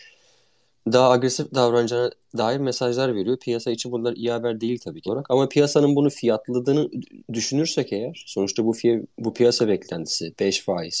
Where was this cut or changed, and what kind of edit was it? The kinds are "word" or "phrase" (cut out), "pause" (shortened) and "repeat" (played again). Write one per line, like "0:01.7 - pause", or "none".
0:05.1 - phrase
0:07.2 - pause
0:09.1 - pause

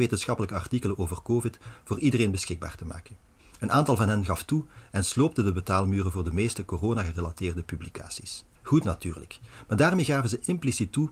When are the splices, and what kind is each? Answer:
0:08.6 - pause

